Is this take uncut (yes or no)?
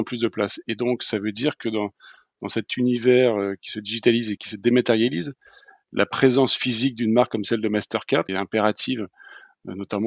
no